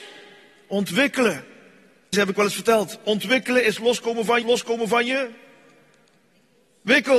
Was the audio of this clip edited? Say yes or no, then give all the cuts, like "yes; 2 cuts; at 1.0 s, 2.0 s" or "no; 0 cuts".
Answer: yes; 2 cuts; at 2.1 s, 4.4 s